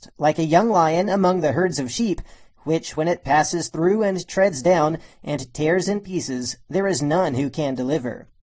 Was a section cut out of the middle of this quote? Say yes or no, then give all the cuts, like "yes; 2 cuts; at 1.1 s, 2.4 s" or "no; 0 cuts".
no; 0 cuts